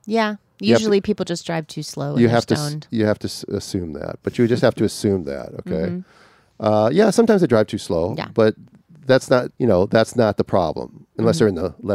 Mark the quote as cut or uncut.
cut